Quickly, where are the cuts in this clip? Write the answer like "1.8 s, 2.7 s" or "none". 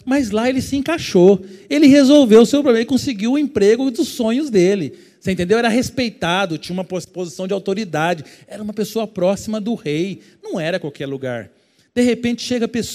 none